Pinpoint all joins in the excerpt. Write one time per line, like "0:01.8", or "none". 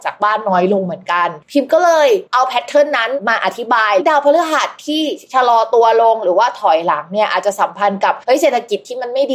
0:01.4
0:02.3
0:08.2